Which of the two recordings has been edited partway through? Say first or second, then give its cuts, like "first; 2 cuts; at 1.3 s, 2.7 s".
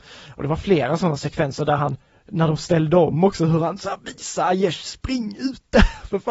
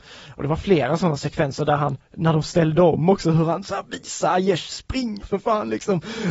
second; 2 cuts; at 2.0 s, 5.2 s